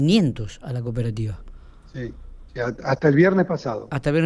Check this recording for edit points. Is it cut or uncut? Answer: uncut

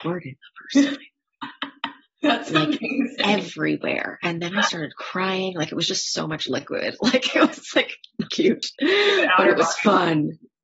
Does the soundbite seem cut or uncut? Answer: cut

